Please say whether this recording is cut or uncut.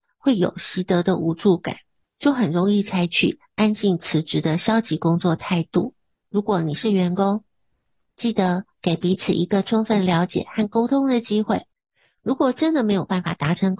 cut